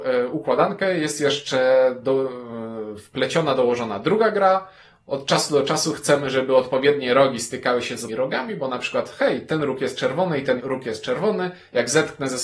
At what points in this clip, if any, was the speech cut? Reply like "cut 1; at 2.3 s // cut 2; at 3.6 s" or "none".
cut 1; at 8.1 s // cut 2; at 10.6 s